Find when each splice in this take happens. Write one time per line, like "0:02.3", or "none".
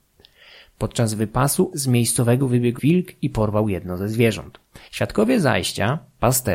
0:01.7
0:02.4
0:02.8
0:04.9